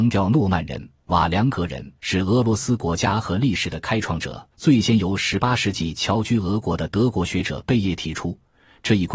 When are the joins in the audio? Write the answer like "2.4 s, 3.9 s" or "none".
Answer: 2.0 s, 4.5 s